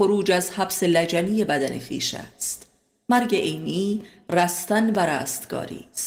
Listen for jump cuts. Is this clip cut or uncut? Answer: uncut